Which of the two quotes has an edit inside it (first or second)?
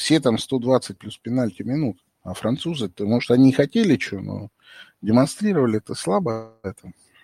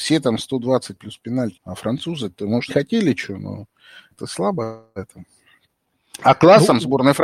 second